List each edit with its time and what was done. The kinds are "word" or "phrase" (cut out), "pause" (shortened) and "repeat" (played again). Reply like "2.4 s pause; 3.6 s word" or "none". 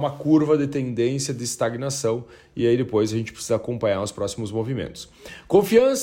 none